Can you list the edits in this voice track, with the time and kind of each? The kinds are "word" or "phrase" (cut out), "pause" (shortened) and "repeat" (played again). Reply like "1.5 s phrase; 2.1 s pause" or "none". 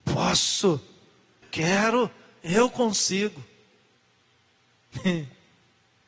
1.4 s word